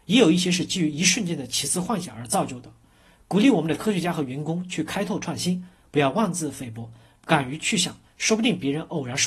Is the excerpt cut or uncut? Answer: uncut